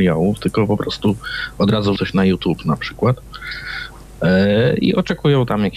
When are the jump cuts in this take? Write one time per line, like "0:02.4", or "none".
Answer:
0:02.0